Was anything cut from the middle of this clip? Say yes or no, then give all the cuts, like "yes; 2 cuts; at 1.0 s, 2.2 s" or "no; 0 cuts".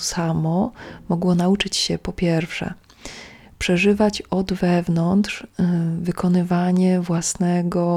no; 0 cuts